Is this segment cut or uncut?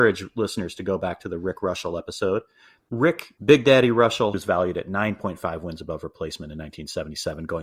uncut